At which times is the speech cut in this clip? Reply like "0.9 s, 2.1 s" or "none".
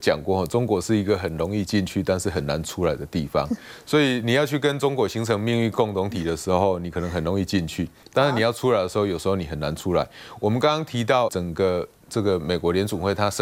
11.3 s